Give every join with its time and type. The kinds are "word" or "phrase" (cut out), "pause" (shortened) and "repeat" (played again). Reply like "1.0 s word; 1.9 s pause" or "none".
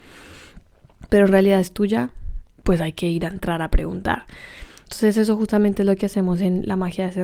2.5 s pause